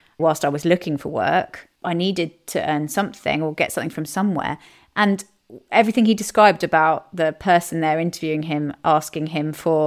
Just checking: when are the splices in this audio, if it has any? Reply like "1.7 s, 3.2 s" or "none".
1.7 s